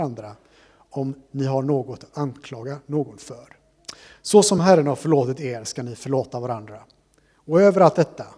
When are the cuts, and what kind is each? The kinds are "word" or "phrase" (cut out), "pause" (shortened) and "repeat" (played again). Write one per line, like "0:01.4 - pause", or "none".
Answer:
none